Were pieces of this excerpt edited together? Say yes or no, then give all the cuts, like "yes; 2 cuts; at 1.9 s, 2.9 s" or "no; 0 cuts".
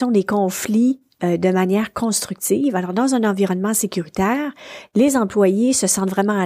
no; 0 cuts